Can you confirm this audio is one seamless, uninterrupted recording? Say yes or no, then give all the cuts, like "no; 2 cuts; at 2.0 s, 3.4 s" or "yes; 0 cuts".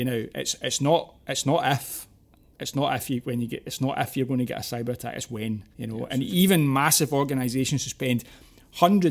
no; 1 cut; at 5.7 s